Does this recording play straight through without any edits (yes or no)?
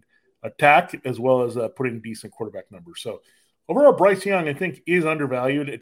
yes